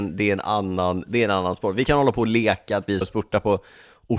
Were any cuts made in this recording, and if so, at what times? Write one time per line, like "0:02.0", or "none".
0:03.0